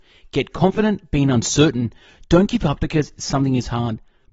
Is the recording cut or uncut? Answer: cut